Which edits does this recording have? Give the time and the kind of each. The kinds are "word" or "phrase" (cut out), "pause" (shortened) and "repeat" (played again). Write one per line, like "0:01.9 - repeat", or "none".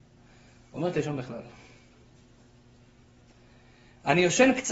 0:00.9 - phrase